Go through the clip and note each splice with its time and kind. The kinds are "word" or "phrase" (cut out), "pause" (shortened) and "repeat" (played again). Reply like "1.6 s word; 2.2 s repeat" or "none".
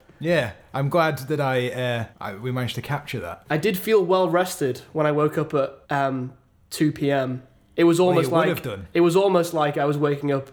2.1 s pause; 5.8 s pause